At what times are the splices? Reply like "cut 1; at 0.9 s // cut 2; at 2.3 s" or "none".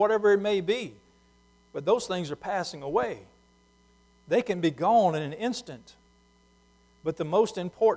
none